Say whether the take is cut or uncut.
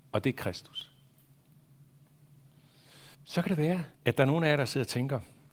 cut